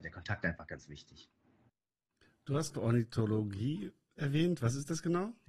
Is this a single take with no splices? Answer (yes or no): no